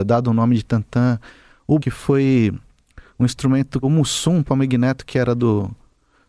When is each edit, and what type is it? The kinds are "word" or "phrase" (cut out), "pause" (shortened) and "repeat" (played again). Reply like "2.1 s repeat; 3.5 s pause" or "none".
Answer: 1.8 s word; 3.8 s word; 4.4 s word